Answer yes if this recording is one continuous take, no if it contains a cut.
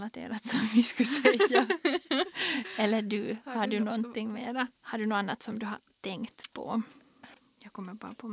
no